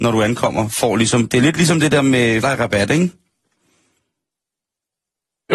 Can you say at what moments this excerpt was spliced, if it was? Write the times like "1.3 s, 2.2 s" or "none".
2.4 s